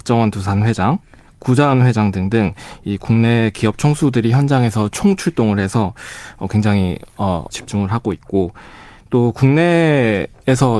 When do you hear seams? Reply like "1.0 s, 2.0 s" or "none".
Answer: 7.5 s